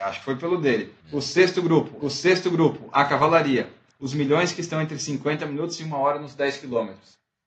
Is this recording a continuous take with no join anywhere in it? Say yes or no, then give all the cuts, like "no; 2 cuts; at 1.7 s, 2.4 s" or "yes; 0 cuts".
no; 2 cuts; at 1.0 s, 2.0 s